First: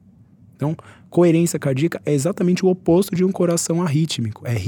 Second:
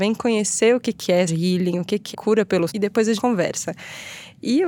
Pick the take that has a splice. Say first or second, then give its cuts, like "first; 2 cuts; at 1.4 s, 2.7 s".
second; 4 cuts; at 1.3 s, 2.1 s, 2.7 s, 3.2 s